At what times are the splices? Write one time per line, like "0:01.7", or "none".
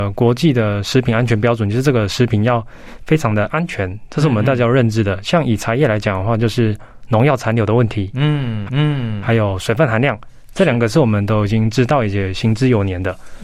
0:08.7